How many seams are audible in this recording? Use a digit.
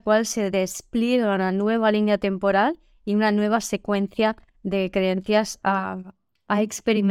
0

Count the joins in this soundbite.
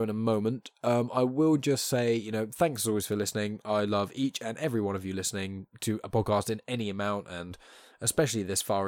0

